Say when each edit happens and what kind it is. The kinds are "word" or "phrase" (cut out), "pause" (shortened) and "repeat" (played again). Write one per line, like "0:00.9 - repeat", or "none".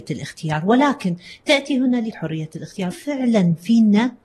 0:02.1 - word
0:02.9 - word